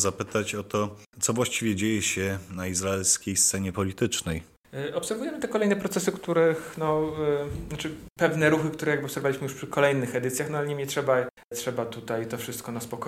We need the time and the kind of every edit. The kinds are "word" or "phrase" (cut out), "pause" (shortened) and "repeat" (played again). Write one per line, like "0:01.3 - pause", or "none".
none